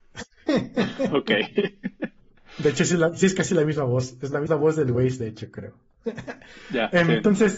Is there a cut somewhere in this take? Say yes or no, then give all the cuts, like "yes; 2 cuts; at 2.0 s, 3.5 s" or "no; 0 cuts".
yes; 1 cut; at 4.5 s